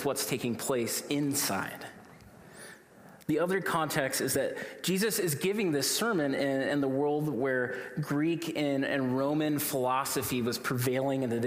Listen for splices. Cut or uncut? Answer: uncut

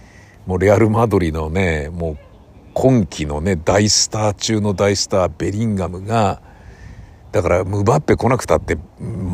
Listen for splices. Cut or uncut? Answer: uncut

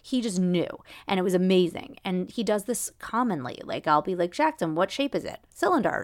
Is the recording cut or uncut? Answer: uncut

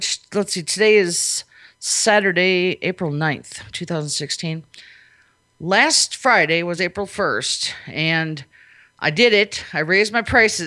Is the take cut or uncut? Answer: uncut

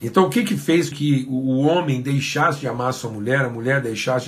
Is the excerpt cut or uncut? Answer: cut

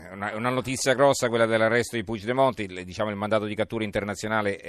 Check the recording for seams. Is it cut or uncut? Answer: uncut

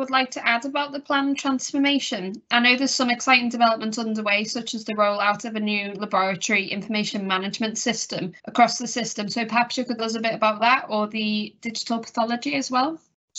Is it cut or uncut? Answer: cut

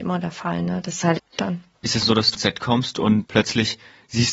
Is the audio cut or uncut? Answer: cut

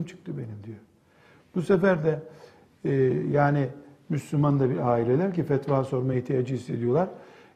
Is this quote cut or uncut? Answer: uncut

